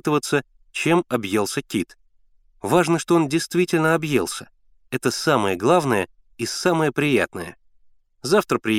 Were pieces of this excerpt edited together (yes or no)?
no